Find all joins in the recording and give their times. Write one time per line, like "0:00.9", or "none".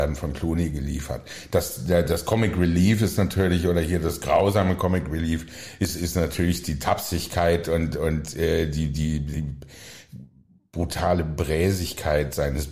none